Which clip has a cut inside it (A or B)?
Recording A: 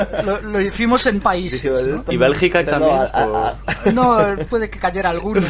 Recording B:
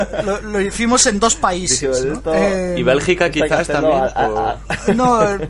A